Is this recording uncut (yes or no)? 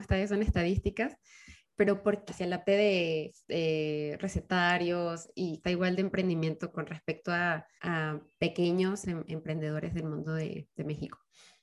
no